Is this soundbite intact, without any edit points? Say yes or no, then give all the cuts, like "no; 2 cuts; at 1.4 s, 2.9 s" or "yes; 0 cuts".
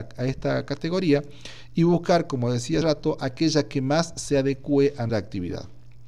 no; 2 cuts; at 2.8 s, 5.1 s